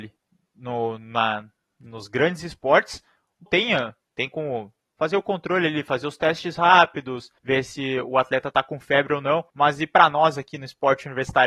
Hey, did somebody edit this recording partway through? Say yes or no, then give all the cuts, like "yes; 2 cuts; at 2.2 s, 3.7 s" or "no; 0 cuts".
yes; 3 cuts; at 3.5 s, 7.4 s, 9.5 s